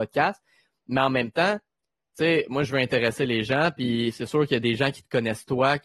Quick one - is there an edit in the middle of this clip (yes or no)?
no